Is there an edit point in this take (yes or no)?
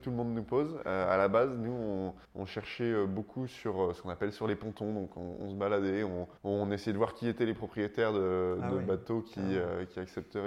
yes